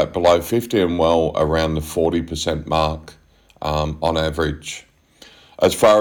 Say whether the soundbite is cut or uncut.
uncut